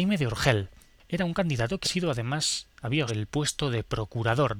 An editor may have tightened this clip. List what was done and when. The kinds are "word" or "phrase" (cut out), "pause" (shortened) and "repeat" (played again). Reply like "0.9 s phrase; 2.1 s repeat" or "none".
1.8 s word; 3.1 s word